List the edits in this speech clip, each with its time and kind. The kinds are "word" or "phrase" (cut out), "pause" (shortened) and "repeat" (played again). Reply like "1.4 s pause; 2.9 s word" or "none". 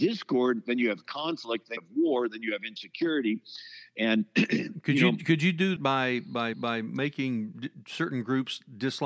1.8 s word; 5.8 s word; 6.5 s repeat